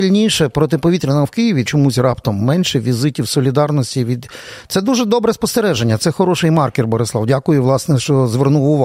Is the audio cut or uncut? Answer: cut